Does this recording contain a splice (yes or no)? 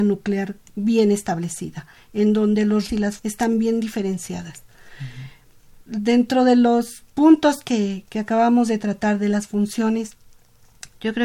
yes